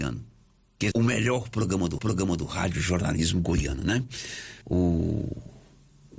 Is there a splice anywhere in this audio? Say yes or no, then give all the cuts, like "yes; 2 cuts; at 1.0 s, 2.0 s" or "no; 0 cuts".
yes; 3 cuts; at 0.9 s, 2.0 s, 4.6 s